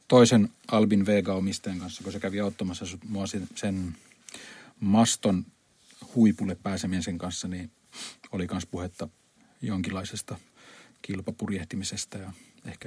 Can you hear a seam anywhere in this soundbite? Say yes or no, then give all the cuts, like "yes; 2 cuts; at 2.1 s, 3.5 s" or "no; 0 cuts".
yes; 2 cuts; at 3.5 s, 9.4 s